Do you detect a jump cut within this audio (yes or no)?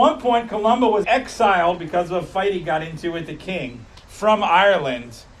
yes